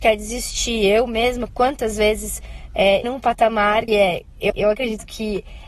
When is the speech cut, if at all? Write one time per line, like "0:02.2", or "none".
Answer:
0:03.0
0:03.9
0:04.5